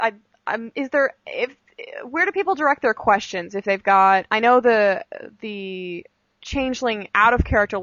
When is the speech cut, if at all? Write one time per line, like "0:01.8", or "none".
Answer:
none